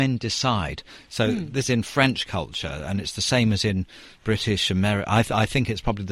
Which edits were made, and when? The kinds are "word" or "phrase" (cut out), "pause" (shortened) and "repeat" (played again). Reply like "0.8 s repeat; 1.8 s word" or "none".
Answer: 1.6 s word